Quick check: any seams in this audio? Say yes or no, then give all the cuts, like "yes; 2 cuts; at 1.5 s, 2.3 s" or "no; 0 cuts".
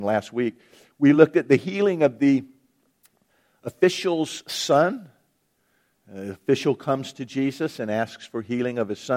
no; 0 cuts